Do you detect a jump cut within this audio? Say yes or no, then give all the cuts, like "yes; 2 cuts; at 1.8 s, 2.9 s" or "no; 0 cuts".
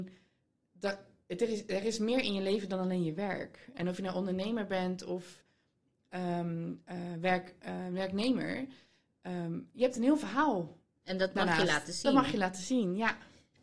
no; 0 cuts